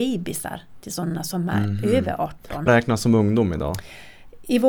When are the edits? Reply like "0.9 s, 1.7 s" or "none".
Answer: 2.7 s